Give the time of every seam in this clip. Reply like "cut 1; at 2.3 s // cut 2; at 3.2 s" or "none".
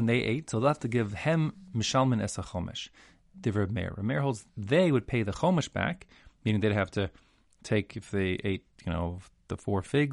none